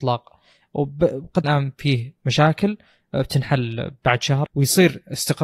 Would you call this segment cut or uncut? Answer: cut